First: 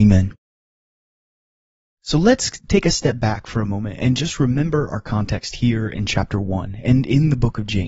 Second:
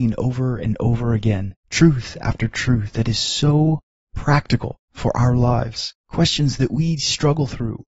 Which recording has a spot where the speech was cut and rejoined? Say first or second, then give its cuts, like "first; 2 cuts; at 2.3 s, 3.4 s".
second; 2 cuts; at 1.6 s, 6.0 s